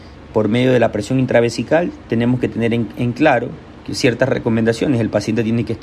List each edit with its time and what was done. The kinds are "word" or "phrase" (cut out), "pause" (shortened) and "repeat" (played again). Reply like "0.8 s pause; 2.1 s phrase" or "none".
none